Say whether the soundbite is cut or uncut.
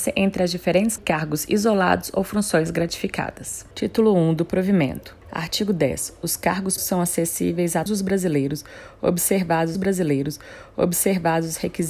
cut